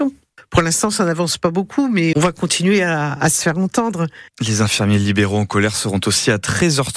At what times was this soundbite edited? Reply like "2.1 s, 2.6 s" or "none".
2.1 s, 4.3 s